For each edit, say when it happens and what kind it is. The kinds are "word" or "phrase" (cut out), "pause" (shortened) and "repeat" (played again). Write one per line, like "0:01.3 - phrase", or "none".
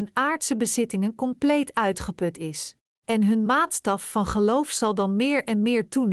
0:02.9 - pause